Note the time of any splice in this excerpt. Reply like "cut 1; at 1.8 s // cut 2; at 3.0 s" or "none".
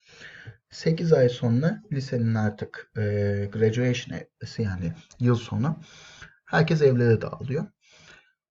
none